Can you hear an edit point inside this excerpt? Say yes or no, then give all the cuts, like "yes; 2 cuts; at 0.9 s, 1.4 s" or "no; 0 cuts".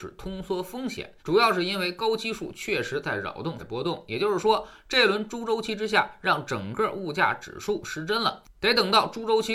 yes; 2 cuts; at 1.2 s, 3.6 s